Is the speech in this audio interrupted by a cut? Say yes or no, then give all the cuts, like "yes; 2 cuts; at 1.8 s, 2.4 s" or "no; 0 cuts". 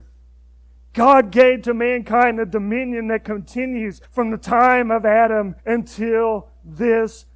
yes; 2 cuts; at 4.0 s, 5.6 s